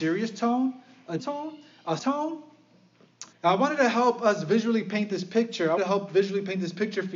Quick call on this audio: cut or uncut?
cut